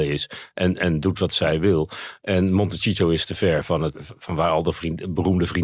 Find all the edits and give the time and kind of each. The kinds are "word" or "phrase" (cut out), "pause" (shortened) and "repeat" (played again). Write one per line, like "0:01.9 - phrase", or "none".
0:03.9 - word